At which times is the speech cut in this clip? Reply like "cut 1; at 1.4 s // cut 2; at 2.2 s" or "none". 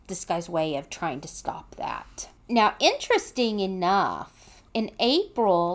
cut 1; at 2.4 s // cut 2; at 4.7 s